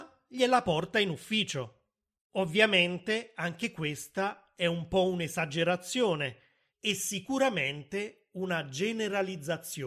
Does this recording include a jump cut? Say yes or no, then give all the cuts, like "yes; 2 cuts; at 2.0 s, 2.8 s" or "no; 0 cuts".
no; 0 cuts